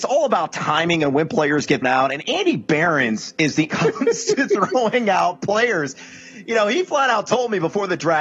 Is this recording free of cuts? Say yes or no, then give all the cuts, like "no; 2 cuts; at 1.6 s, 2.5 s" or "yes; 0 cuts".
no; 2 cuts; at 1.8 s, 3.7 s